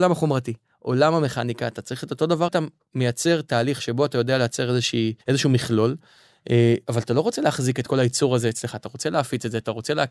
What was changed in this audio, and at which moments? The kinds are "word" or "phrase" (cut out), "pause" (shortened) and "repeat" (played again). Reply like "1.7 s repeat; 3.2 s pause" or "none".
2.5 s phrase; 5.2 s pause